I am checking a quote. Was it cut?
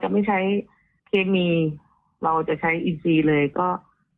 no; 0 cuts

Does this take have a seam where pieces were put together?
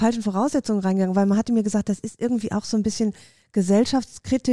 no; 0 cuts

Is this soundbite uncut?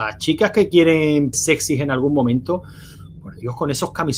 no; 1 cut; at 1.3 s

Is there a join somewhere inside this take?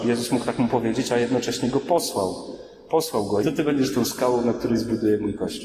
yes; 1 cut; at 3.4 s

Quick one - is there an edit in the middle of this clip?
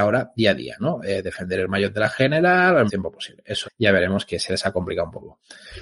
yes; 2 cuts; at 2.9 s, 3.6 s

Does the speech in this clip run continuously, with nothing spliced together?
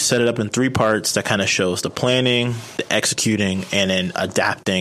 yes; 0 cuts

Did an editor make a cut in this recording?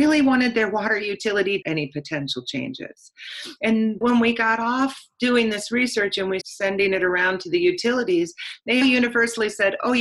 yes; 4 cuts; at 1.6 s, 4.0 s, 6.4 s, 8.8 s

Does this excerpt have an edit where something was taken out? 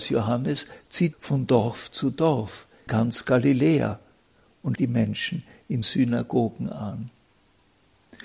yes; 4 cuts; at 1.1 s, 2.9 s, 4.8 s, 5.8 s

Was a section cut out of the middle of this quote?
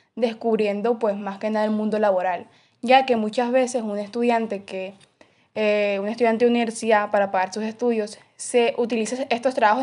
no; 0 cuts

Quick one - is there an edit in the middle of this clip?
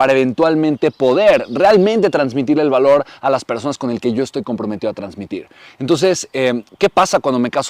no; 0 cuts

